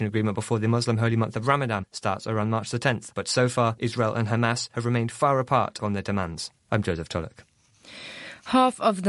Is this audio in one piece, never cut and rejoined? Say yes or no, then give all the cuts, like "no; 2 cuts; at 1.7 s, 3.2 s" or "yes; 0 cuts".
no; 1 cut; at 6.6 s